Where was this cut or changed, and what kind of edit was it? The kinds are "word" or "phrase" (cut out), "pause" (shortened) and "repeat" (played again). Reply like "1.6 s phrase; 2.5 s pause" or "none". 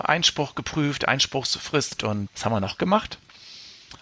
2.0 s word; 2.3 s word